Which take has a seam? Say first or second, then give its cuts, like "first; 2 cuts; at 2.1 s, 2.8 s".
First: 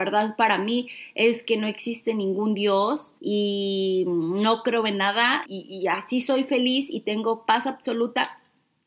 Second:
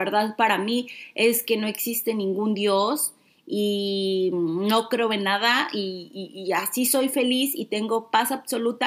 first; 2 cuts; at 3.2 s, 5.4 s